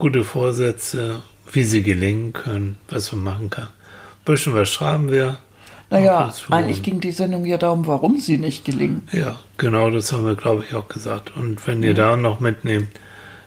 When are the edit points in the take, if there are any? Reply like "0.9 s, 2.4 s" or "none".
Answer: 2.8 s